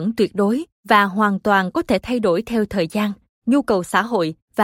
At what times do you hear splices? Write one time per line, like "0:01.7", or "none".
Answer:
none